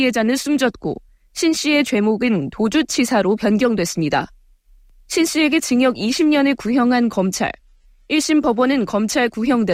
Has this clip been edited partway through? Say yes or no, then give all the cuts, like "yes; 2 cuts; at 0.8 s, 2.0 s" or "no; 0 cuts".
no; 0 cuts